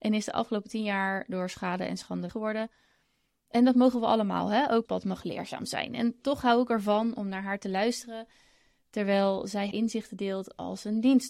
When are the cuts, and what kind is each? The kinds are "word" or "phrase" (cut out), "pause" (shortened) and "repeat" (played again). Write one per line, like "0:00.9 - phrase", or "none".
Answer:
0:02.3 - word
0:04.8 - word
0:09.7 - word